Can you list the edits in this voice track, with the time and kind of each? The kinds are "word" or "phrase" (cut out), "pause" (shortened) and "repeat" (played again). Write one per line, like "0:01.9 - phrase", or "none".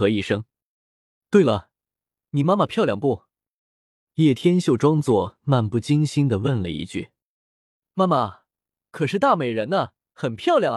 none